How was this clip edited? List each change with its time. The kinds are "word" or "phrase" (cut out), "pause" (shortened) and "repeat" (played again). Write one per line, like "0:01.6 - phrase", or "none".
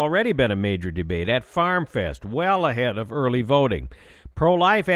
none